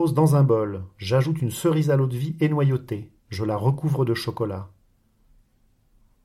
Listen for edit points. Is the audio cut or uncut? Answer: cut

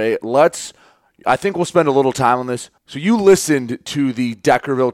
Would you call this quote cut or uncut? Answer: cut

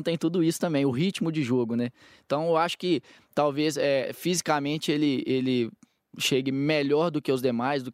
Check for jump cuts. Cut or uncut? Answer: uncut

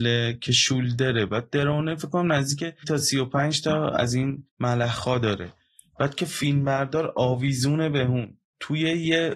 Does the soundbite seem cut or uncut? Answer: cut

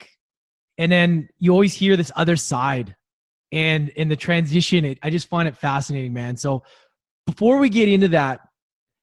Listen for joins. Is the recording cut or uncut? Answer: uncut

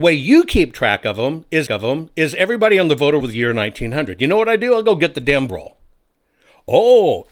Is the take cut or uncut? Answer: cut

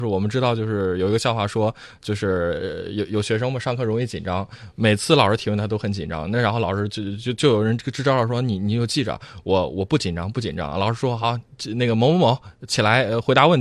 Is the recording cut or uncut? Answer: uncut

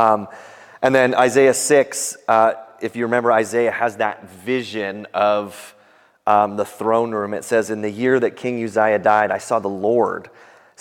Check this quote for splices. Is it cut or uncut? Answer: uncut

